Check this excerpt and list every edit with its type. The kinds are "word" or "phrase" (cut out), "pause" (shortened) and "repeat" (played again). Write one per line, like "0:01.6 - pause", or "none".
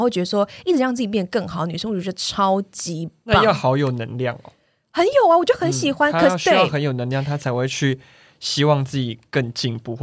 none